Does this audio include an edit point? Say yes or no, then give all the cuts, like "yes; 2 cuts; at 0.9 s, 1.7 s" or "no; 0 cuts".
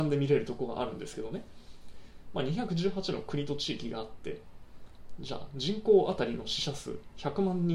no; 0 cuts